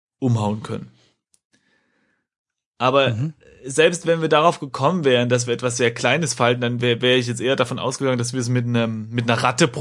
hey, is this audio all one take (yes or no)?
yes